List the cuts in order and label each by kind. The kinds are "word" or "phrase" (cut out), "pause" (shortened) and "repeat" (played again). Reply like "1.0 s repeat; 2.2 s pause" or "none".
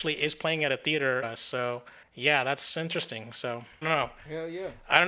1.2 s phrase; 3.8 s word